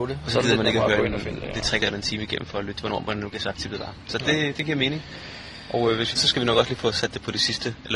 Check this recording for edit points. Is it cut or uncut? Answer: cut